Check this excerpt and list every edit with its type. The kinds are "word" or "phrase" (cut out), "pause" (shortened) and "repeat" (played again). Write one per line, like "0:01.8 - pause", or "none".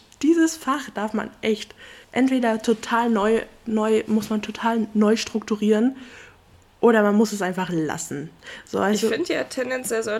0:02.0 - pause